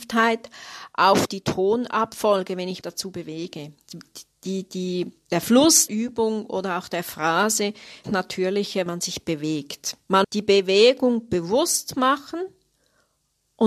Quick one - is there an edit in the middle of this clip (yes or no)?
yes